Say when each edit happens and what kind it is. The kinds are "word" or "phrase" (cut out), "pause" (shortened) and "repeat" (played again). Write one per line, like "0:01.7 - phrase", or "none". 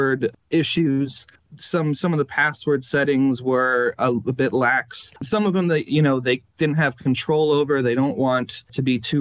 none